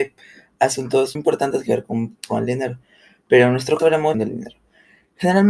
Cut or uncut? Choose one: cut